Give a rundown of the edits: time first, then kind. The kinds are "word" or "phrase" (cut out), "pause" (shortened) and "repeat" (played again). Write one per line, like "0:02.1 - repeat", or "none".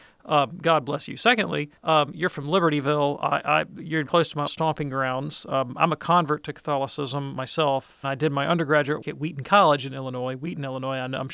0:01.8 - pause
0:04.1 - word
0:04.5 - word
0:08.0 - word
0:09.0 - word